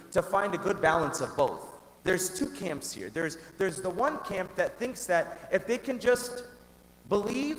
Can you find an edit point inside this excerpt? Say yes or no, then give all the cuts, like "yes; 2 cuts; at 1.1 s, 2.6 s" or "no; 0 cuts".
yes; 1 cut; at 2.0 s